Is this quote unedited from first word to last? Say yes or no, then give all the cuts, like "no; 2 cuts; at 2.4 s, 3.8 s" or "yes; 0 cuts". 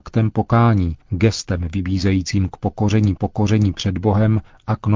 no; 2 cuts; at 1.0 s, 3.2 s